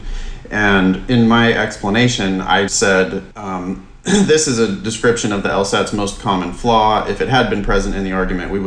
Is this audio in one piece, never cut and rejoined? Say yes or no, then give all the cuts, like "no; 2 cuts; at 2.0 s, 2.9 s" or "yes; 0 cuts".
no; 2 cuts; at 2.7 s, 3.3 s